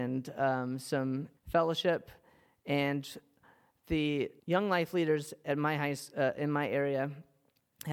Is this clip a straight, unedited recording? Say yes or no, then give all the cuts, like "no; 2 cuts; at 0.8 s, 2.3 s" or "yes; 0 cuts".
no; 2 cuts; at 1.4 s, 4.4 s